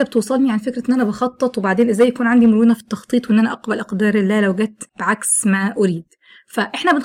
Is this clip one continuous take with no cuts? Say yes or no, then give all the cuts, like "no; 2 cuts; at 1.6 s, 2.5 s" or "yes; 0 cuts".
no; 1 cut; at 4.9 s